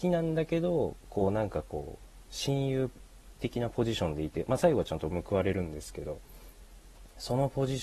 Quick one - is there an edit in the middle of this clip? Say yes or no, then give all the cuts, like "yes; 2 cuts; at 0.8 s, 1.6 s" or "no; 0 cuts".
no; 0 cuts